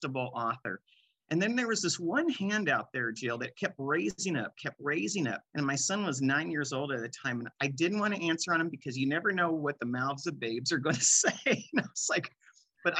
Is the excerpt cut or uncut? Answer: cut